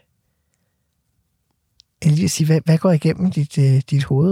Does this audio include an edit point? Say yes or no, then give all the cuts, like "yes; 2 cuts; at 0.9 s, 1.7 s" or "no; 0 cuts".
no; 0 cuts